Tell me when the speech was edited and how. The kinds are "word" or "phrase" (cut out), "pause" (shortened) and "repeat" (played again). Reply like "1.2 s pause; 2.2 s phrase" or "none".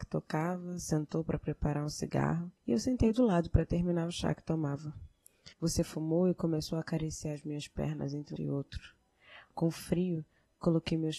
2.6 s pause; 5.5 s pause; 8.4 s word